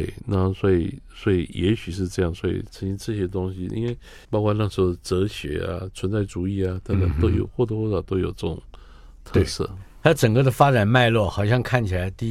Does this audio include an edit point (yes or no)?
yes